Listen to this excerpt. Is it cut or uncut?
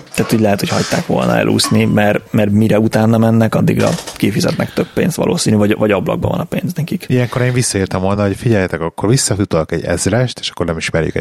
uncut